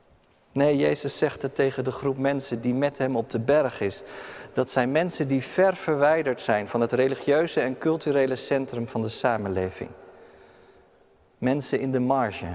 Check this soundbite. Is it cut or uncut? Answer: uncut